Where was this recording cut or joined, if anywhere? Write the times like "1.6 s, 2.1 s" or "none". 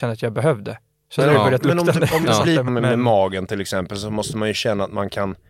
2.7 s

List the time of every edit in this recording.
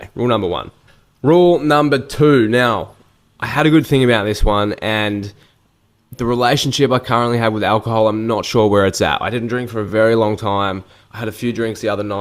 none

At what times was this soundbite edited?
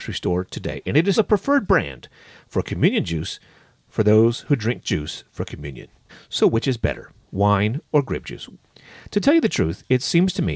1.1 s, 6.1 s

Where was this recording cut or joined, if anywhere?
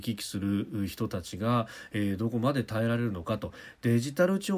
none

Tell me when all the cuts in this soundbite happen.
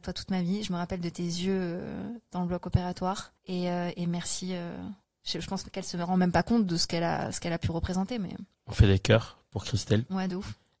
3.4 s, 5.0 s, 8.5 s

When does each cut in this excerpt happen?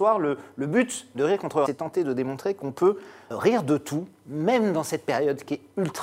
1.7 s, 3.3 s

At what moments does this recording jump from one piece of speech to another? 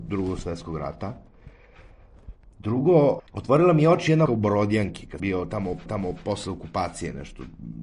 3.3 s, 4.3 s, 5.2 s, 5.9 s

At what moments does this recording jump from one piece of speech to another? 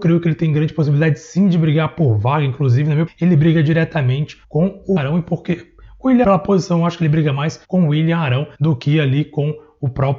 3.1 s, 4.4 s, 5.0 s, 6.2 s, 7.6 s, 8.5 s

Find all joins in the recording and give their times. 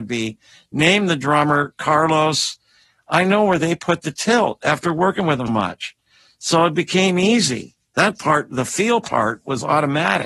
5.5 s

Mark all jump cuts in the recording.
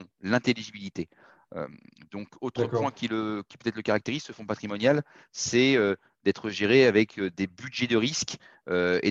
none

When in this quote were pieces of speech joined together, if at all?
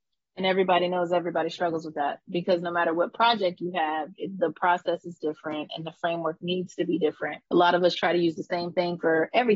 5.7 s, 7.5 s

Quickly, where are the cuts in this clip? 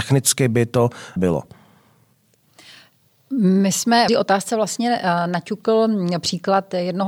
1.2 s, 4.1 s

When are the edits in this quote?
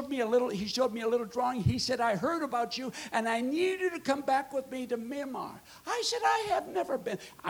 none

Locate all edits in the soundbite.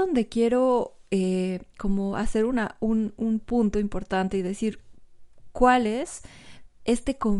1.7 s

